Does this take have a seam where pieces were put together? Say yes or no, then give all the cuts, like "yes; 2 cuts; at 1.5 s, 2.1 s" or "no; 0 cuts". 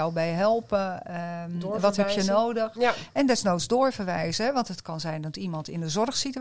no; 0 cuts